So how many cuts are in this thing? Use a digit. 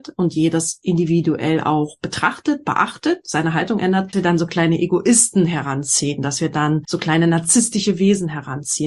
1